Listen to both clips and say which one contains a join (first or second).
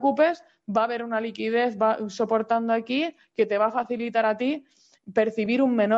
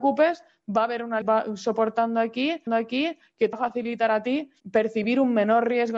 second